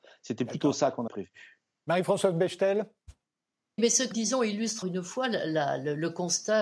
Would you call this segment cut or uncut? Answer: cut